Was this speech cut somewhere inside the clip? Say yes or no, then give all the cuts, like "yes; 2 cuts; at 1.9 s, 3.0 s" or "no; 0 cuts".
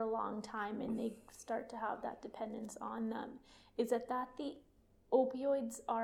no; 0 cuts